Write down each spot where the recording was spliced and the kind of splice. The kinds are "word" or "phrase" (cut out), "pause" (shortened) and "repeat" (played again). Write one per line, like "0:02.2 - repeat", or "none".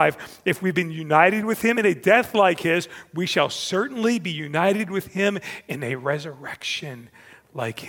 none